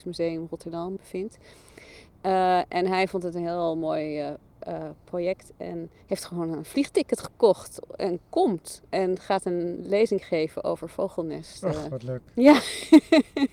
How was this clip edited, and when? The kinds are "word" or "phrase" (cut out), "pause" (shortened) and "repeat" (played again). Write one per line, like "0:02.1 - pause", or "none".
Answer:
0:01.0 - word
0:06.0 - pause
0:08.9 - pause